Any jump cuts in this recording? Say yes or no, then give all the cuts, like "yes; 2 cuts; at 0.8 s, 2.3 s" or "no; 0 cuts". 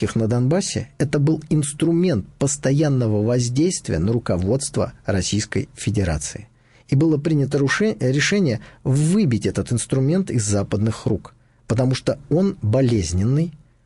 no; 0 cuts